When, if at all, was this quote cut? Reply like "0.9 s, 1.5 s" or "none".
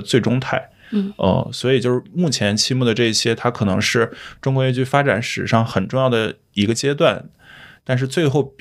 none